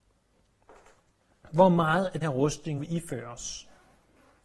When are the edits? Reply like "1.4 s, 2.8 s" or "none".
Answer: 2.2 s, 2.8 s